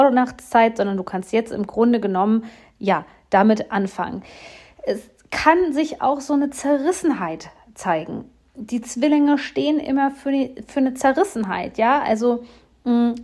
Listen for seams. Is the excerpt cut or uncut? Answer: uncut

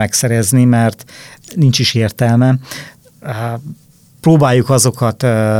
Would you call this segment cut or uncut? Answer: uncut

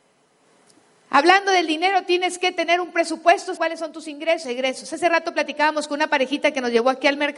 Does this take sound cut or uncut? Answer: cut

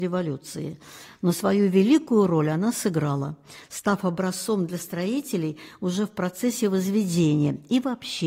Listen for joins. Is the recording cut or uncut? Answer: uncut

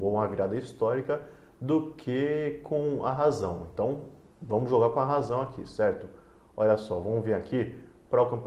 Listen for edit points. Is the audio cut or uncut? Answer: uncut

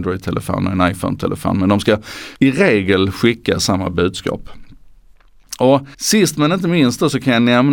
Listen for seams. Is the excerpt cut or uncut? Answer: cut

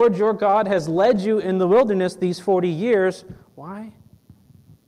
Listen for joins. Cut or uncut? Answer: uncut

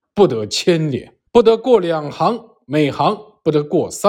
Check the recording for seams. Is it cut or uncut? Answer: cut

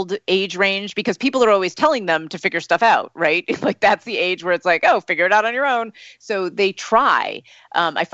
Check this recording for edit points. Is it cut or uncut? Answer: uncut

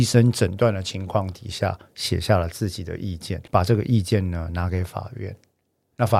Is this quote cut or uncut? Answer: cut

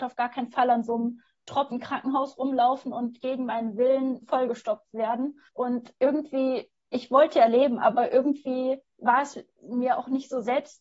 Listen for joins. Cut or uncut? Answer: cut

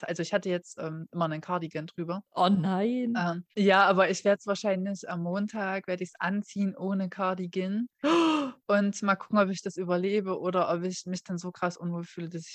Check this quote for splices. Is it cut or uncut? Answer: cut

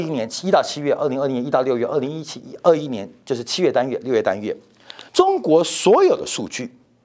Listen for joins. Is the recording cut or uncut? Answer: cut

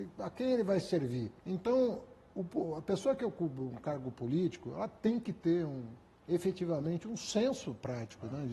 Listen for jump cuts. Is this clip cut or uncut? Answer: cut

